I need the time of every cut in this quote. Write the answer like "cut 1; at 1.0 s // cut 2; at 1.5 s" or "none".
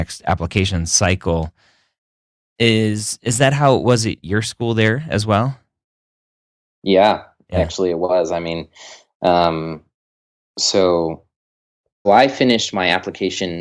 cut 1; at 4.2 s // cut 2; at 12.1 s